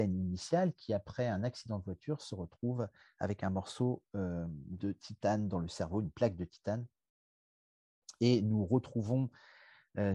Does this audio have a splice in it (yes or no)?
no